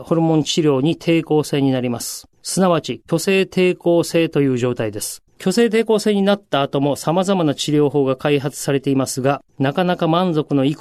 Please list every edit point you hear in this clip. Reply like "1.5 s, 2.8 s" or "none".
2.3 s, 5.3 s, 9.5 s